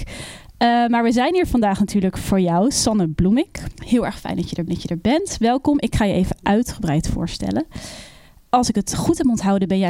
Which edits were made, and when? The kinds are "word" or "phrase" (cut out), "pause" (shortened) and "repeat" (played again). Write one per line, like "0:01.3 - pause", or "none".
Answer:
0:04.7 - repeat